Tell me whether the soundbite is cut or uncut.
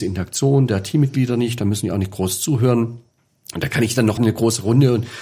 cut